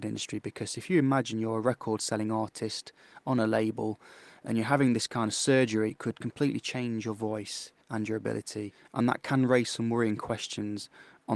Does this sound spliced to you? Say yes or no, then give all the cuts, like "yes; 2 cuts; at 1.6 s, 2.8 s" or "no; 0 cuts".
yes; 2 cuts; at 5.9 s, 7.8 s